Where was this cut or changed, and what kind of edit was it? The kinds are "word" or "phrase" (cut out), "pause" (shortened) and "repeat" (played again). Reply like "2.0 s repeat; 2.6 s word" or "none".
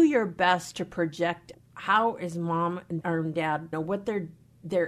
1.5 s word; 3.0 s word; 3.7 s word